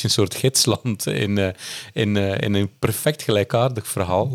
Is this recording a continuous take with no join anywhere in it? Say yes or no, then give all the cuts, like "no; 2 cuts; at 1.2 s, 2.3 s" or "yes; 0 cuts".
yes; 0 cuts